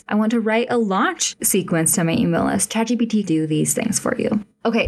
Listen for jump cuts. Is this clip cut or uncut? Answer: cut